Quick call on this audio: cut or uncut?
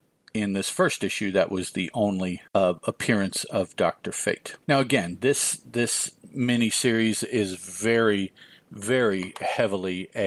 cut